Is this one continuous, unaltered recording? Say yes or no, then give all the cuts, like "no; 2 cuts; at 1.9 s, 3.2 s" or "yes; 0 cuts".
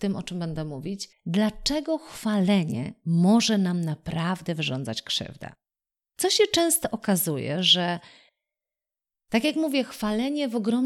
no; 2 cuts; at 1.1 s, 5.9 s